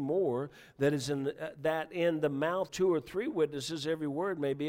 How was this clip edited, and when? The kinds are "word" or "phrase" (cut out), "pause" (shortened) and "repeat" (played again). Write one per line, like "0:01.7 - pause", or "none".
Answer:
0:02.7 - word